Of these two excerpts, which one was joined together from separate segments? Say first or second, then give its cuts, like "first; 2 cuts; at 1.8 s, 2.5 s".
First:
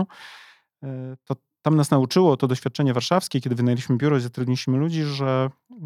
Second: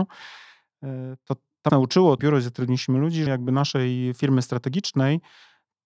second; 3 cuts; at 1.7 s, 2.2 s, 3.3 s